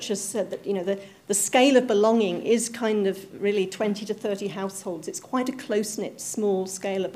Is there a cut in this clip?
no; 0 cuts

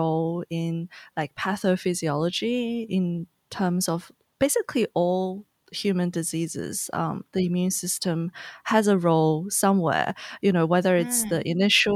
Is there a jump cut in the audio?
no; 0 cuts

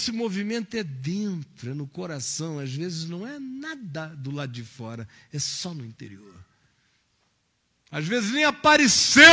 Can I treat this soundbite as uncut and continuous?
yes; 0 cuts

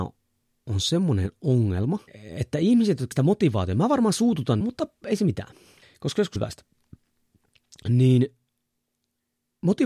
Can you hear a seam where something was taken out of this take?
yes; 5 cuts; at 2.1 s, 3.1 s, 4.6 s, 5.8 s, 6.4 s

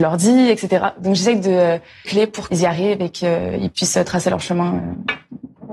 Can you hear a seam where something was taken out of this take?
yes; 2 cuts; at 2.0 s, 2.5 s

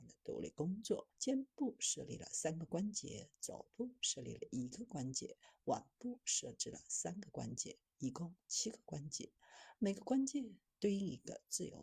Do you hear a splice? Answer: yes; 1 cut; at 1.1 s

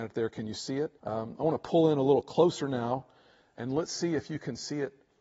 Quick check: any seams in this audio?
yes; 1 cut; at 1.0 s

